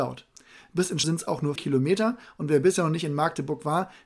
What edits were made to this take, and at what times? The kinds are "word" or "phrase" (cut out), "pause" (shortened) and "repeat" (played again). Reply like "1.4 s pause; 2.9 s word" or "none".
1.0 s word; 1.6 s word